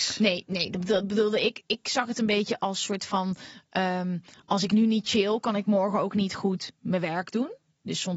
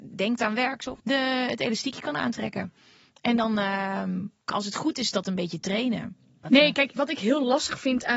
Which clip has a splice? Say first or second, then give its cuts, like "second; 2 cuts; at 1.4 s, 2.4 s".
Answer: second; 3 cuts; at 1.0 s, 4.5 s, 7.0 s